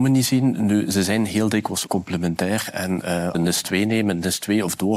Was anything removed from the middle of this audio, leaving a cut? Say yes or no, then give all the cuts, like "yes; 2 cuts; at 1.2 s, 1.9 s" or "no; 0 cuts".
yes; 2 cuts; at 1.9 s, 3.3 s